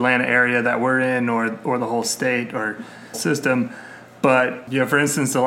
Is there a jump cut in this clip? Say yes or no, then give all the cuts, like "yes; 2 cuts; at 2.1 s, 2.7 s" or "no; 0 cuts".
yes; 1 cut; at 3.1 s